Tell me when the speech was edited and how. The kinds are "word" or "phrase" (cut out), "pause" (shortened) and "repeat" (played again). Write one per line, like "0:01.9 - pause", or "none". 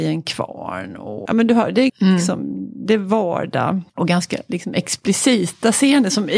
0:01.3 - word
0:01.9 - word
0:03.9 - pause